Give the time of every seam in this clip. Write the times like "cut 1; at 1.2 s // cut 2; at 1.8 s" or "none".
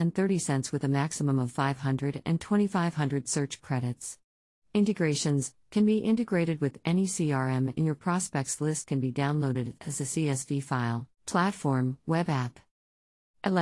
cut 1; at 11.1 s